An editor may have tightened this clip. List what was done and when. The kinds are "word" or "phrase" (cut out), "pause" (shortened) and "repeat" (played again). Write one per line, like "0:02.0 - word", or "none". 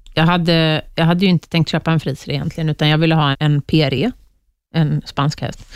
0:03.3 - word